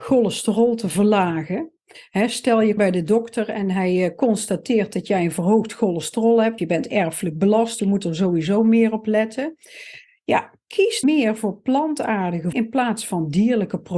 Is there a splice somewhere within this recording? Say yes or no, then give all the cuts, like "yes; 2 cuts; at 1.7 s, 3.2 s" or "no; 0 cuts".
yes; 5 cuts; at 2.8 s, 6.6 s, 7.8 s, 11.0 s, 12.5 s